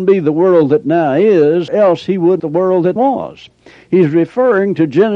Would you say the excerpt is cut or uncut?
cut